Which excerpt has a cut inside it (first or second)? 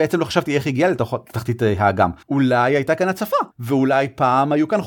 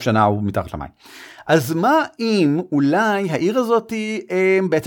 first